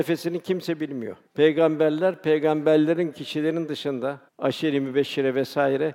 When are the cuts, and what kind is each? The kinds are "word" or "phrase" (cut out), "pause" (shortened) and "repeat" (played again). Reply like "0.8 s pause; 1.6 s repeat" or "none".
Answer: 1.3 s pause; 3.1 s word; 4.3 s pause